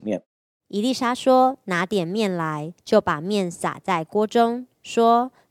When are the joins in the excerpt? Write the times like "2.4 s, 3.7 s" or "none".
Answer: 2.8 s